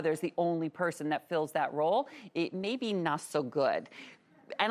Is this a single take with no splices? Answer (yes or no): yes